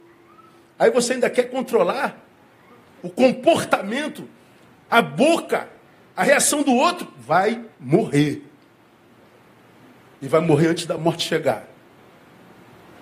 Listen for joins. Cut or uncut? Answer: uncut